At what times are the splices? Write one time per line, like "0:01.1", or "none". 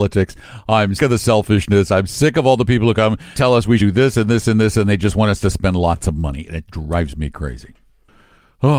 0:01.0
0:03.3
0:03.8
0:06.7